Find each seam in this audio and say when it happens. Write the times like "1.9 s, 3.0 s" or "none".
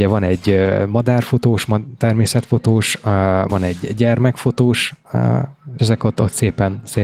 3.5 s, 5.8 s